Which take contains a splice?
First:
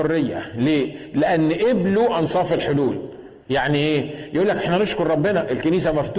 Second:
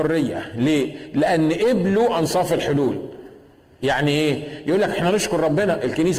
first; 1 cut; at 3.4 s

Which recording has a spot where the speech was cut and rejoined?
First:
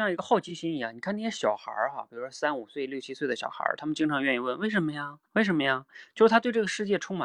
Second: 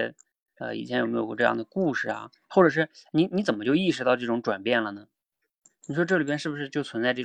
first; 1 cut; at 5.3 s

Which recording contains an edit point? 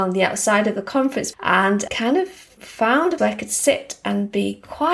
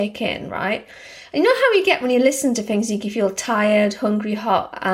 first; 4 cuts; at 1.3 s, 1.9 s, 2.6 s, 3.2 s

